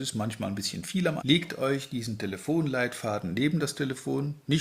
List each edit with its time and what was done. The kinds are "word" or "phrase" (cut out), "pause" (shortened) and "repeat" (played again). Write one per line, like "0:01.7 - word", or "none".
0:01.2 - word